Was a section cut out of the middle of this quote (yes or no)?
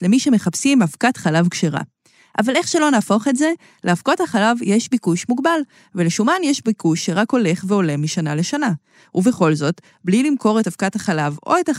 no